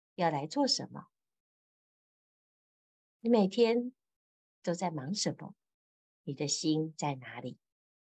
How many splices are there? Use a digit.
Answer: 0